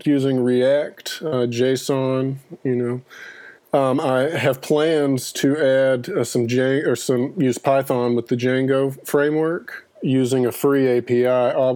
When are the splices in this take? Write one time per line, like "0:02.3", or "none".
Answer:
0:03.6